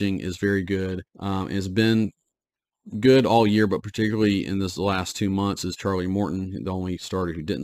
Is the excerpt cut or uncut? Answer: cut